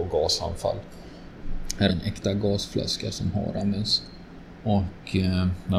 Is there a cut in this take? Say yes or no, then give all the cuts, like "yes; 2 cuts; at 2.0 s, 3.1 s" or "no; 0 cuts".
yes; 1 cut; at 1.9 s